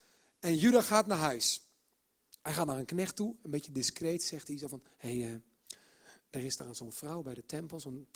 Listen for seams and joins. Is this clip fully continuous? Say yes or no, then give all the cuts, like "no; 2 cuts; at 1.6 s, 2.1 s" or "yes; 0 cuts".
yes; 0 cuts